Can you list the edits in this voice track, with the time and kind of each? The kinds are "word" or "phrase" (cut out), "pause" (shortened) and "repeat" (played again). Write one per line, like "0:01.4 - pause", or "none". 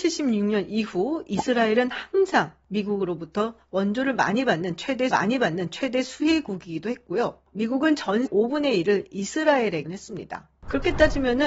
0:05.1 - repeat
0:08.3 - phrase
0:09.9 - word